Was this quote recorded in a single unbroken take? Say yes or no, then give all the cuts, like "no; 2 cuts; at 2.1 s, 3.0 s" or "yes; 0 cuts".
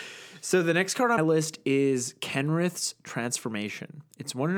no; 1 cut; at 1.2 s